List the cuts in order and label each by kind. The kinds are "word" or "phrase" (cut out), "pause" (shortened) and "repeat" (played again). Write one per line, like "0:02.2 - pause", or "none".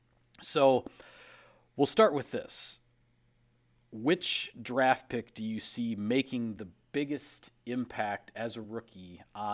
none